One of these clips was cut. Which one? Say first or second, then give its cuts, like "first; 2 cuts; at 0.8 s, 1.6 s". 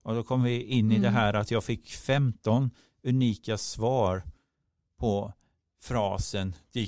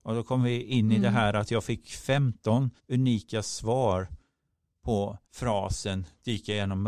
second; 2 cuts; at 2.8 s, 5.2 s